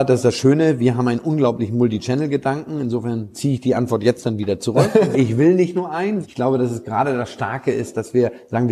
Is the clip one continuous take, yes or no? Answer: no